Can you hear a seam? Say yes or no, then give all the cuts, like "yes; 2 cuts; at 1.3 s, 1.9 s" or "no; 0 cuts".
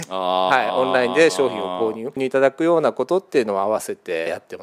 yes; 1 cut; at 2.1 s